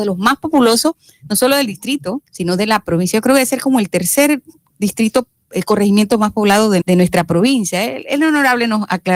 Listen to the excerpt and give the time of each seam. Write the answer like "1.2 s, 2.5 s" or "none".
2.3 s, 6.8 s